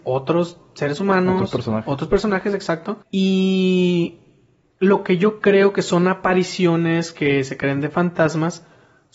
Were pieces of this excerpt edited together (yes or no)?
yes